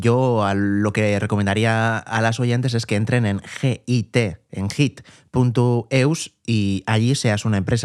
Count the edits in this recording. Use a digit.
0